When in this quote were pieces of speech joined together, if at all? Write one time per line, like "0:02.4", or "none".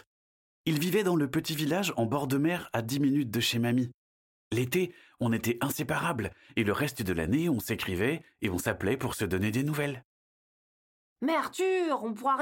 none